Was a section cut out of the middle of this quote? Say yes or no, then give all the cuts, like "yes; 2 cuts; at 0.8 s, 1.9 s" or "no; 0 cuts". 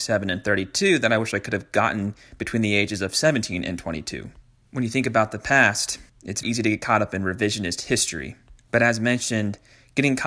yes; 1 cut; at 6.4 s